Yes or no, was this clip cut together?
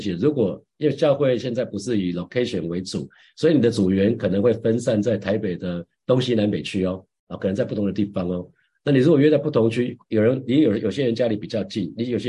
no